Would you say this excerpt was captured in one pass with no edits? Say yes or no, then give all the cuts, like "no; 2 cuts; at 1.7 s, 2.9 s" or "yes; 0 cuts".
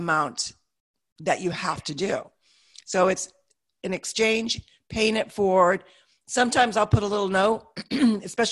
yes; 0 cuts